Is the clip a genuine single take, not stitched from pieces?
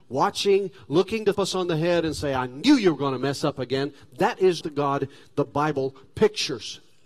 no; 2 cuts; at 1.3 s, 4.6 s

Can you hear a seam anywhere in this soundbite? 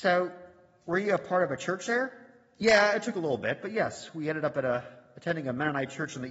no; 0 cuts

